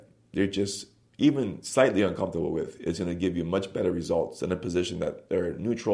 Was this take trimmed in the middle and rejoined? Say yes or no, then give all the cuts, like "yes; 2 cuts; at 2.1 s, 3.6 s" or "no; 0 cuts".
no; 0 cuts